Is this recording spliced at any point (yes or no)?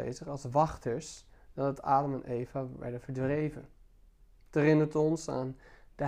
no